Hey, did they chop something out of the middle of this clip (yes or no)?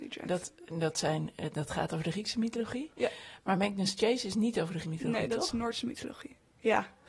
yes